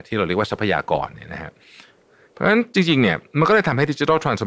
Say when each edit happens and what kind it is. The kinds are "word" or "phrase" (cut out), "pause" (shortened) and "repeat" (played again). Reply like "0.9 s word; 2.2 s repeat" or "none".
none

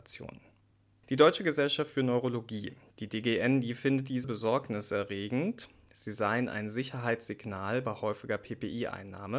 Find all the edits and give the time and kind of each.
4.2 s word

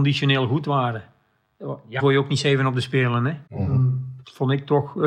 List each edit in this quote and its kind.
2.0 s word; 3.5 s pause

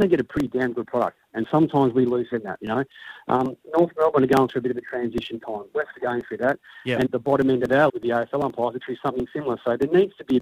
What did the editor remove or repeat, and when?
2.3 s word; 5.9 s word; 7.1 s word; 7.9 s word; 8.8 s word

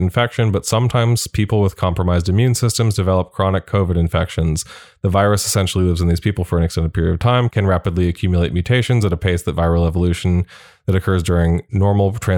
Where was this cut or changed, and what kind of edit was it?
none

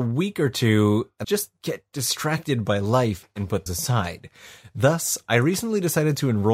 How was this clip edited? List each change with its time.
1.2 s word; 3.7 s word

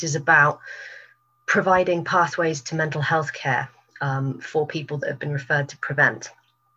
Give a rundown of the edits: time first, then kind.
none

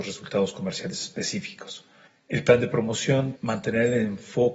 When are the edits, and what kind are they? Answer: 2.1 s pause; 3.4 s word

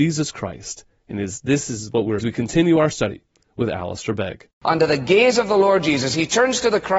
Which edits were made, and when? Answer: 2.2 s phrase; 4.6 s pause

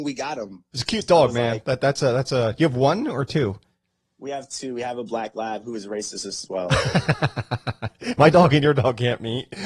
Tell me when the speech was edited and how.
none

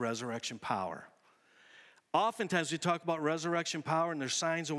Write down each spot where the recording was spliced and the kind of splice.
none

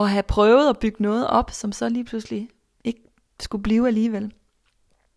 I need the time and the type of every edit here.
none

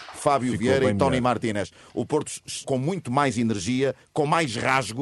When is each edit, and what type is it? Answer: 2.6 s word

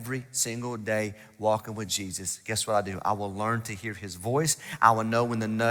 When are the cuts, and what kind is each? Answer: none

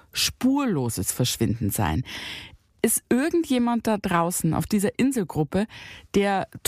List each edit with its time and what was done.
none

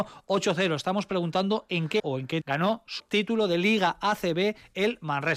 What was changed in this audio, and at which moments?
2.0 s word; 2.4 s word; 3.0 s word

